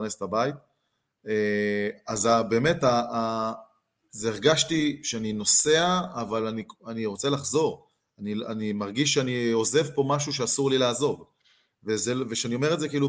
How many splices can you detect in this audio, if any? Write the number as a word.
zero